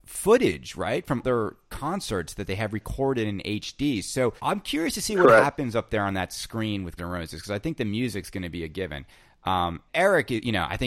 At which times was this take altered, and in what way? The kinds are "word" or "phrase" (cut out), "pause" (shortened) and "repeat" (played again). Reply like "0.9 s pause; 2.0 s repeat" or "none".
1.2 s word; 4.4 s pause; 7.0 s word; 9.9 s word